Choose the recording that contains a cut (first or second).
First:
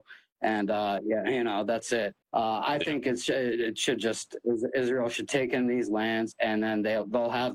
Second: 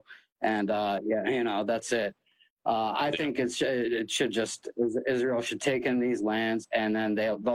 first